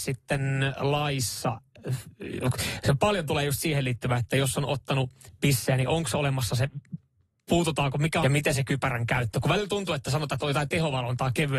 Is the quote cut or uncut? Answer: cut